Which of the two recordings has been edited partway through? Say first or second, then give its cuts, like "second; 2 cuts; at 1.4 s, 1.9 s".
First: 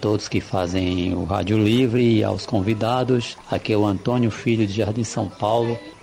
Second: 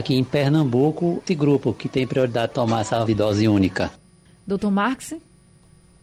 second; 4 cuts; at 1.3 s, 2.5 s, 3.1 s, 4.3 s